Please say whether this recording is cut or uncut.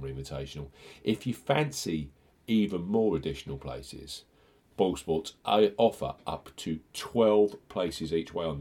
uncut